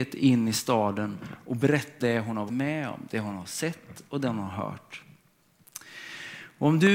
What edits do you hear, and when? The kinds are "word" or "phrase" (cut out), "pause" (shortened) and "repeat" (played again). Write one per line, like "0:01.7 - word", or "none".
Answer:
0:02.0 - word
0:02.5 - word